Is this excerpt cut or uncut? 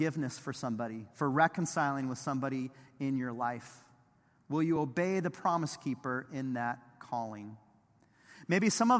uncut